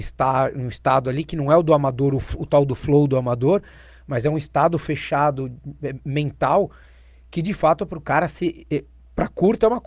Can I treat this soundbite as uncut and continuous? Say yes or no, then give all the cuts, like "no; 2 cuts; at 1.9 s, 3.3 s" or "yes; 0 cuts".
yes; 0 cuts